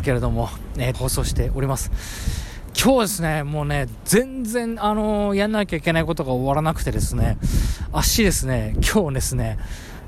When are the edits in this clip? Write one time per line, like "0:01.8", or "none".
0:00.9